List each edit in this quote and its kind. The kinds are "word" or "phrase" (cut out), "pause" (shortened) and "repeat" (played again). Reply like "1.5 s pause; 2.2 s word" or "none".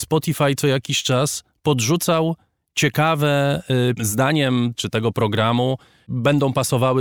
4.0 s phrase; 4.7 s phrase